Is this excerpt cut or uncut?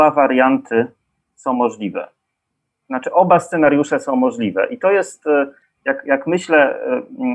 uncut